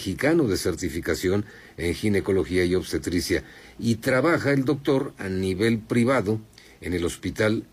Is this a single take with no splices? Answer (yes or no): yes